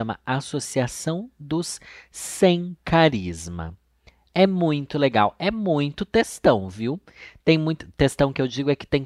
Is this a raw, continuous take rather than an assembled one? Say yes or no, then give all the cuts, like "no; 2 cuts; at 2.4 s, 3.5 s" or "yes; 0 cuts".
yes; 0 cuts